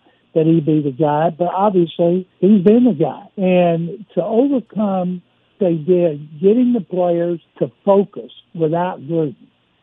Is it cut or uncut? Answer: cut